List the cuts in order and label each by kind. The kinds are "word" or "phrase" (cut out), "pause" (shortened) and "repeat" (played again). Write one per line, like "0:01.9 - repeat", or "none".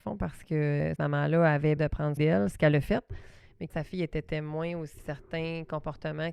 0:01.0 - word
0:01.8 - word
0:02.2 - word
0:03.7 - word
0:05.0 - word